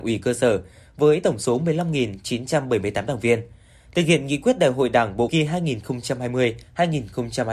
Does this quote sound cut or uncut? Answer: cut